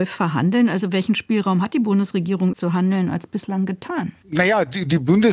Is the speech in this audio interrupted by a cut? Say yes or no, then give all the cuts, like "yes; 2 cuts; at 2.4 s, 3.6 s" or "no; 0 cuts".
yes; 2 cuts; at 2.5 s, 4.2 s